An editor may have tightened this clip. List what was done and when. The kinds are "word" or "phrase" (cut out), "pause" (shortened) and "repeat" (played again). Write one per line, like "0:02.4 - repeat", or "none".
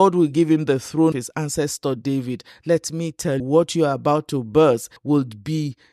0:01.1 - word
0:03.4 - word
0:05.0 - pause